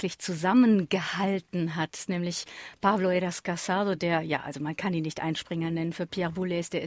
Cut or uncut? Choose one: uncut